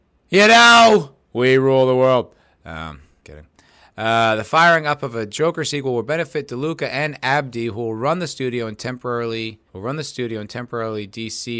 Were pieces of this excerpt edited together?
yes; 3 cuts; at 1.2 s, 3.2 s, 9.7 s

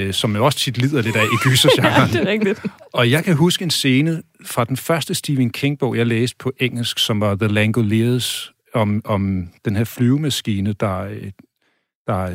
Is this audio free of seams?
no; 1 cut; at 9.6 s

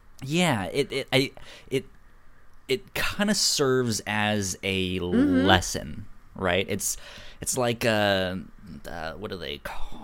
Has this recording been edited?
no; 0 cuts

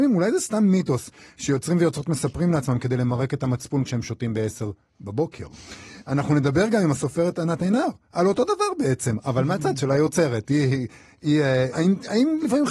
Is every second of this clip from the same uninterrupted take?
no; 1 cut; at 11.7 s

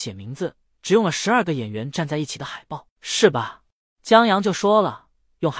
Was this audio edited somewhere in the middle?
yes; 1 cut; at 3.8 s

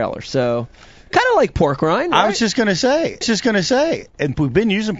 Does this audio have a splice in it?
yes; 1 cut; at 3.2 s

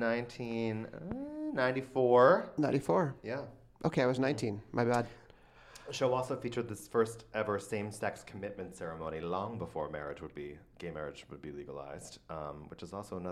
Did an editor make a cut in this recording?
no; 0 cuts

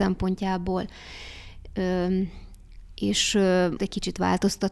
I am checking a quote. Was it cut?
yes; 1 cut; at 3.8 s

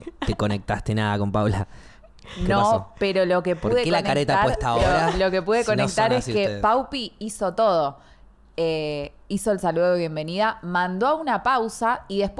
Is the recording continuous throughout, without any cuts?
yes; 0 cuts

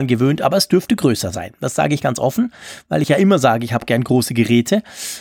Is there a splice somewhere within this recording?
no; 0 cuts

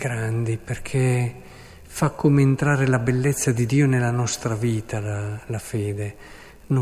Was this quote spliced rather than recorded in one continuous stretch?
no; 0 cuts

